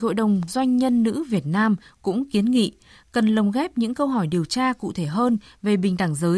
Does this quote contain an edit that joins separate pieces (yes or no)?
no